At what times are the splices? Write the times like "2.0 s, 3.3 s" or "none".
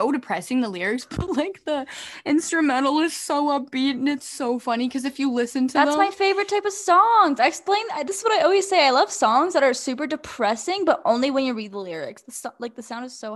none